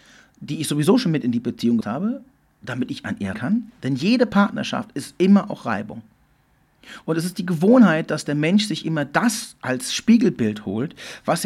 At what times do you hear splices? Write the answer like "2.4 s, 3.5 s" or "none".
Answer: 1.8 s, 3.3 s